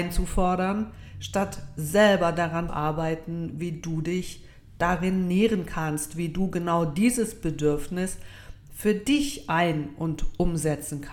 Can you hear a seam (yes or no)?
yes